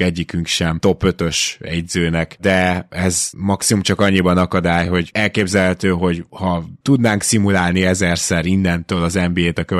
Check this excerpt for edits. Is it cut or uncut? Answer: uncut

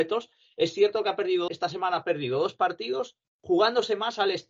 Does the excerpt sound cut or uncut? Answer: cut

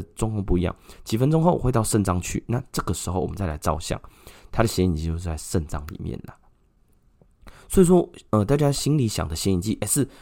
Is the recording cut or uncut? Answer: uncut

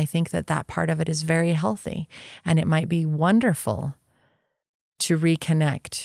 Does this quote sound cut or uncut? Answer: uncut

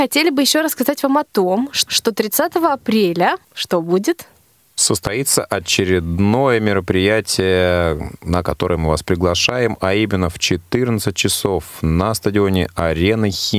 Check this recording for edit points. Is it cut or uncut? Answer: cut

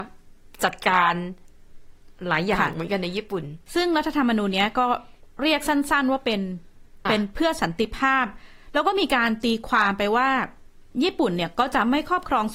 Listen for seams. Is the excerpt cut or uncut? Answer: cut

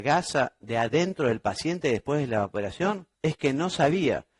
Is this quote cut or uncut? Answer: cut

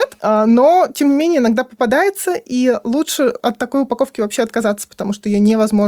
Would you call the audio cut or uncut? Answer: uncut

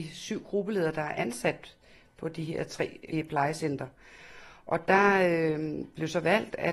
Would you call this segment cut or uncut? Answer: uncut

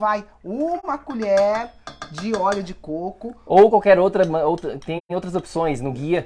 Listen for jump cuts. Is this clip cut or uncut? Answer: uncut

